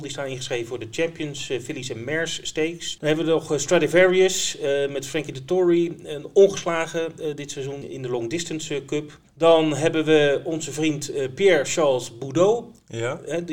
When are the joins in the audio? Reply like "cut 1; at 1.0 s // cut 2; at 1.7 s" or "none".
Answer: cut 1; at 9.3 s